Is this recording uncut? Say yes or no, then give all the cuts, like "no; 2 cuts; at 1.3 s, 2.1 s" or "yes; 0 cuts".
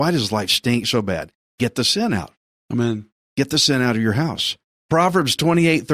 yes; 0 cuts